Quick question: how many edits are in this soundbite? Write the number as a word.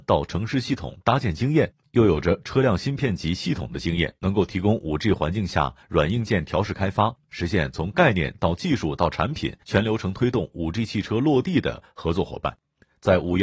two